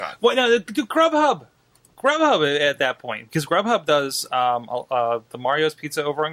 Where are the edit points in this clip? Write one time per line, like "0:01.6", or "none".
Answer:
none